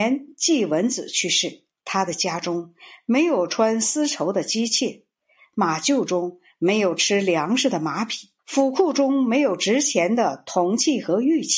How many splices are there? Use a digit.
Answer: 2